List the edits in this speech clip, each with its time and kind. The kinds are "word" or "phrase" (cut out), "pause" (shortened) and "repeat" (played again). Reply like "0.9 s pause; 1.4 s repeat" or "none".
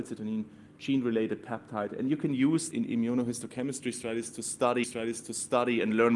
2.7 s word; 4.8 s repeat